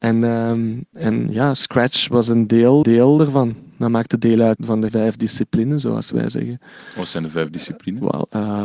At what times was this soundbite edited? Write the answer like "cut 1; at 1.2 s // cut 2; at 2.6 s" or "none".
cut 1; at 0.9 s // cut 2; at 2.8 s // cut 3; at 4.6 s // cut 4; at 4.9 s